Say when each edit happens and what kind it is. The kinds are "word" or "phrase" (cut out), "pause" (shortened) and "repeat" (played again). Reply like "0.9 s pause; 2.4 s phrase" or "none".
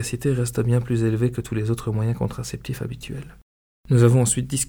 none